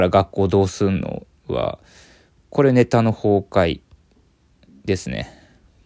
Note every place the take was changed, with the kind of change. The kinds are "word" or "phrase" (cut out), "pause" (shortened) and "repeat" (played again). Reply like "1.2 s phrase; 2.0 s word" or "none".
none